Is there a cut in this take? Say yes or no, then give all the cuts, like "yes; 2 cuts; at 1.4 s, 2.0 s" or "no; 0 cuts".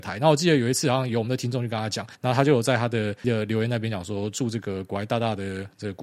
yes; 2 cuts; at 2.1 s, 3.2 s